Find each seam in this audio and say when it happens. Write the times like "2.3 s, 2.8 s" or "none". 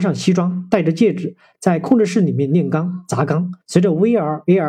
3.6 s